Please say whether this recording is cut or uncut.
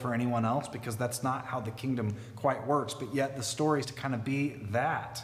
cut